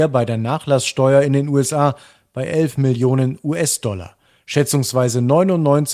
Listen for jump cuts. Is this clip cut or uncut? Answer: uncut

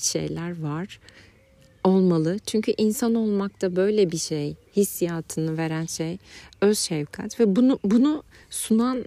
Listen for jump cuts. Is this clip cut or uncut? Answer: uncut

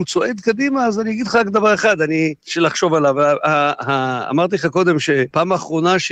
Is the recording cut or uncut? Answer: uncut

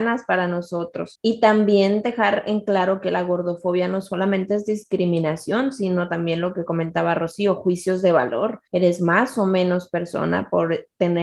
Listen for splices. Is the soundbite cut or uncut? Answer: cut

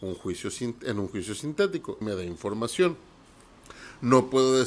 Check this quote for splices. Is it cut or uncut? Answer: cut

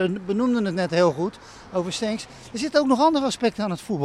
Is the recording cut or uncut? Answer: uncut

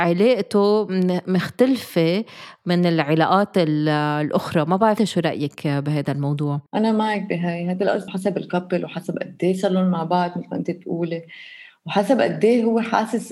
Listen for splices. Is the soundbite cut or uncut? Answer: cut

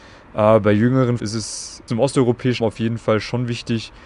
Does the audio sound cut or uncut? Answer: cut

